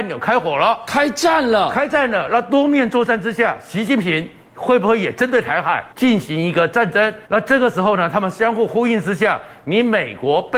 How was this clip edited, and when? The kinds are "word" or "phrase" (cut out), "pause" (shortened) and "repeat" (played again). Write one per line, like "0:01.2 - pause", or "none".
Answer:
0:05.9 - pause
0:07.3 - pause

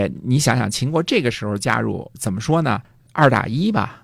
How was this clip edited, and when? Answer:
0:02.1 - word

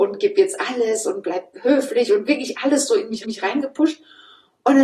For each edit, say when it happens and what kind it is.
0:03.2 - repeat

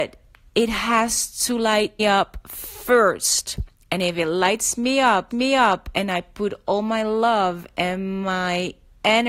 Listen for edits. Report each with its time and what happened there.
0:02.0 - word
0:05.3 - repeat

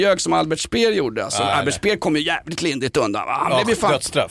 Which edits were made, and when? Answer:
none

